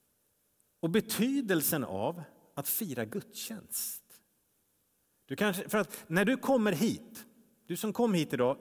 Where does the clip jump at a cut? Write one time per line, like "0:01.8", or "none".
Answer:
none